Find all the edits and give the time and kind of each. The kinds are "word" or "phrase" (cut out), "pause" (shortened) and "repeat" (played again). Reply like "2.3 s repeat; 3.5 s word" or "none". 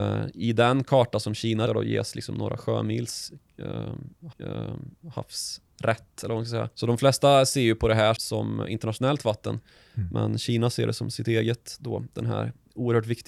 1.7 s word; 4.3 s repeat; 6.7 s pause; 8.2 s word